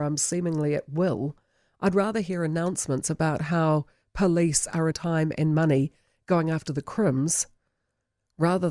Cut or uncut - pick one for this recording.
cut